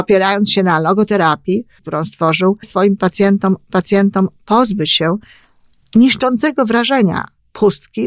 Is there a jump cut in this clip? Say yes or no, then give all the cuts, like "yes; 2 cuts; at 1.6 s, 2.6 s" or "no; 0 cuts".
yes; 3 cuts; at 1.8 s, 2.6 s, 3.7 s